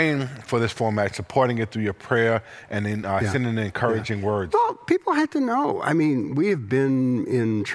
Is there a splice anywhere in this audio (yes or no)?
no